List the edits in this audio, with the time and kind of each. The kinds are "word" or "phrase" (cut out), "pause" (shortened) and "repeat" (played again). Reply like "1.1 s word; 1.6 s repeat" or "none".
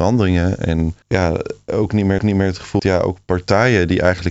1.0 s pause; 2.2 s repeat; 2.8 s word